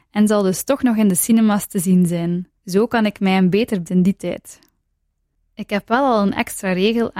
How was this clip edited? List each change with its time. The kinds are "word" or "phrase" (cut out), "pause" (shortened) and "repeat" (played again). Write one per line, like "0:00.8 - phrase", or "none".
0:02.6 - pause
0:03.9 - phrase